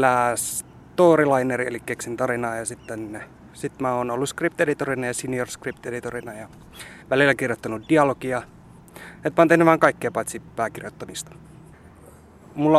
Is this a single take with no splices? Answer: no; 1 cut; at 7.0 s

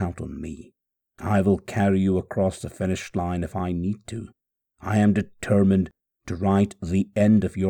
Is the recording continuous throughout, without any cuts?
yes; 0 cuts

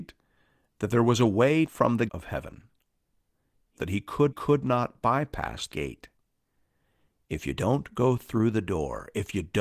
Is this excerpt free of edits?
no; 5 cuts; at 1.7 s, 2.1 s, 3.8 s, 4.3 s, 5.7 s

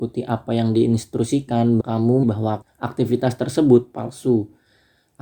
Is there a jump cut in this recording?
yes; 3 cuts; at 1.8 s, 2.2 s, 2.6 s

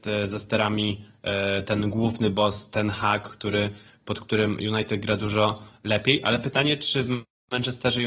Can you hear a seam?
no; 0 cuts

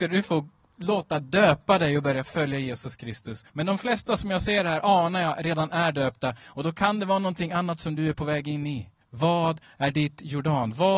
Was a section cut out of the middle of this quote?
yes; 2 cuts; at 3.5 s, 9.0 s

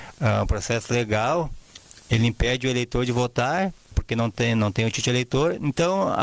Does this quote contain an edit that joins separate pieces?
yes; 1 cut; at 3.9 s

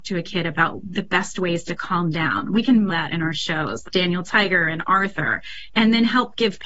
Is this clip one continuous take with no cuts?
no; 2 cuts; at 2.9 s, 3.8 s

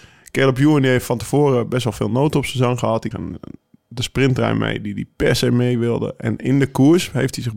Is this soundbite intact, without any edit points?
no; 1 cut; at 3.1 s

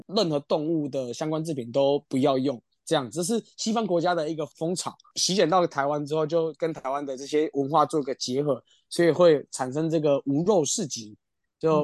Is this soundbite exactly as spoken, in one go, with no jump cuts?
yes; 0 cuts

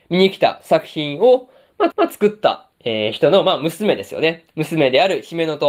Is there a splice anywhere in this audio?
yes; 3 cuts; at 1.9 s, 2.7 s, 4.5 s

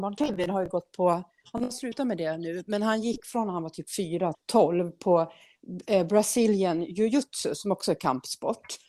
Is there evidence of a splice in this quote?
yes; 1 cut; at 4.3 s

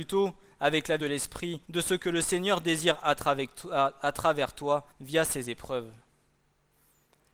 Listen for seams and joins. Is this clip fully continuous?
no; 4 cuts; at 1.0 s, 1.6 s, 3.0 s, 4.9 s

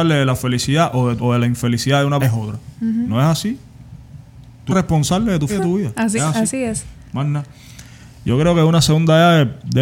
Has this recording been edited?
yes; 5 cuts; at 1.2 s, 2.2 s, 4.7 s, 5.5 s, 6.2 s

